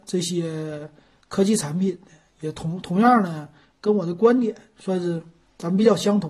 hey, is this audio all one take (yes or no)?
yes